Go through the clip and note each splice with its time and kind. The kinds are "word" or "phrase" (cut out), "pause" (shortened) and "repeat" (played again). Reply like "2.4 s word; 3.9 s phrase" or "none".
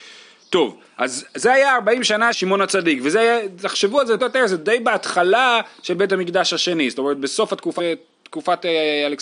2.3 s word; 4.2 s word; 7.8 s word